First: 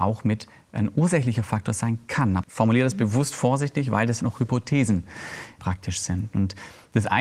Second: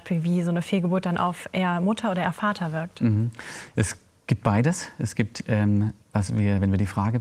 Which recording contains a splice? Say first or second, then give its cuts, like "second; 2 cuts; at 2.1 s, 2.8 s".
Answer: first; 3 cuts; at 2.4 s, 4.2 s, 5.6 s